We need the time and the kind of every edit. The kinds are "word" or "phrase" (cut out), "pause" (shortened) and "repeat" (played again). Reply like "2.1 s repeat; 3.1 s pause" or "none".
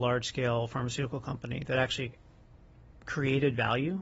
none